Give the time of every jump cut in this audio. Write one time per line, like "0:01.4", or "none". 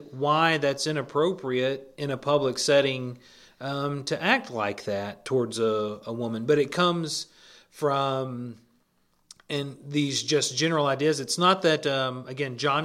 none